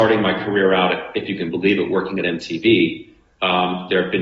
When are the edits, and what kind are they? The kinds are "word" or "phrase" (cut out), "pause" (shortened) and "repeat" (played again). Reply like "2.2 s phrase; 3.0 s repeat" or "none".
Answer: none